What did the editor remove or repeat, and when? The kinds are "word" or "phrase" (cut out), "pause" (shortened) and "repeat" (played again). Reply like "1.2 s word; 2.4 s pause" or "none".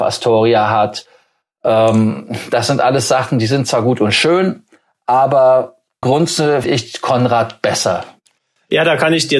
6.0 s word; 6.6 s word